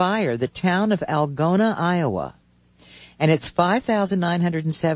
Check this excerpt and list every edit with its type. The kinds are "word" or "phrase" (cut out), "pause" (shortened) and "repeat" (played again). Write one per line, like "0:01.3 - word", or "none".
none